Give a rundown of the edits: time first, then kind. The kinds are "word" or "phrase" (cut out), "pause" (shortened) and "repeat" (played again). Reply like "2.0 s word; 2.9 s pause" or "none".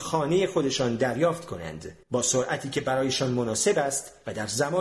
2.0 s pause